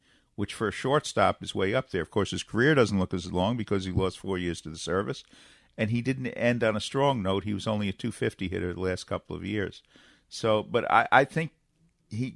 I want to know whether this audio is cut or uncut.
uncut